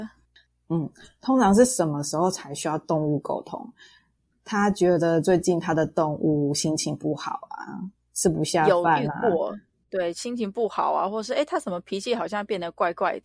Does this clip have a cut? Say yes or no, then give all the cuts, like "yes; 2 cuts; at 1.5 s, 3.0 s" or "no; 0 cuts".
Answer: no; 0 cuts